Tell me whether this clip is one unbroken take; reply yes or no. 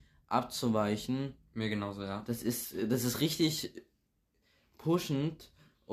yes